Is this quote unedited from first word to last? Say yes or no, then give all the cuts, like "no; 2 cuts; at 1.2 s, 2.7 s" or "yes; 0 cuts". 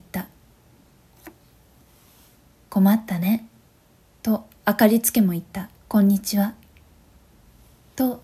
no; 1 cut; at 5.8 s